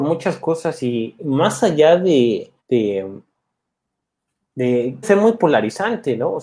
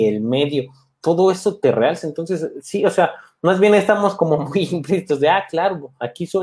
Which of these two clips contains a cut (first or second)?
first